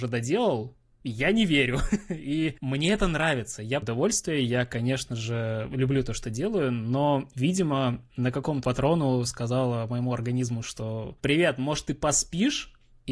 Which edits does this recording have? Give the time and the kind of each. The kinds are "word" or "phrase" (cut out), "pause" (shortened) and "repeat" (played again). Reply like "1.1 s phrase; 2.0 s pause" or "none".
3.8 s phrase; 8.6 s phrase